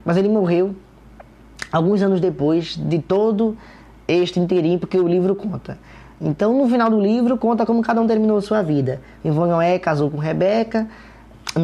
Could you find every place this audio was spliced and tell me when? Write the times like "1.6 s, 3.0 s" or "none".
none